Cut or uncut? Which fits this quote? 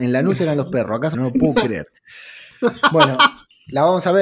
cut